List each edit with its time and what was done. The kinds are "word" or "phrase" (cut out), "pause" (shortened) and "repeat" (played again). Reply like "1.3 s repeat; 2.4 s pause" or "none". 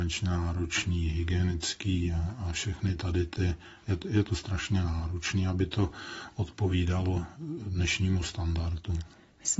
none